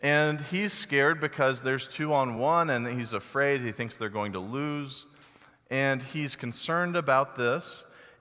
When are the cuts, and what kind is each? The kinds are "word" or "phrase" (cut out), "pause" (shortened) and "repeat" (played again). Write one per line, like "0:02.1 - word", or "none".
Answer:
none